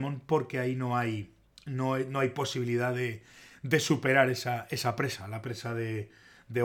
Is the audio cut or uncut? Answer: uncut